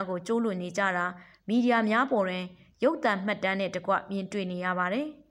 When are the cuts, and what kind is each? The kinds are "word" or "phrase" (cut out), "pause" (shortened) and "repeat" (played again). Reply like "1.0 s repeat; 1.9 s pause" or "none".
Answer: none